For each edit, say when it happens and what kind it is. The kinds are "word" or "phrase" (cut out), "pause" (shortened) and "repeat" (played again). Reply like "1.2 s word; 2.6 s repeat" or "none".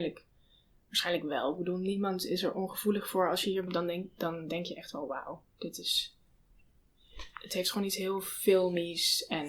3.7 s word; 5.5 s pause